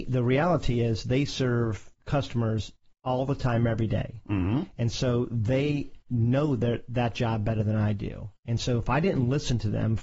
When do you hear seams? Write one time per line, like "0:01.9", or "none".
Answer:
0:01.9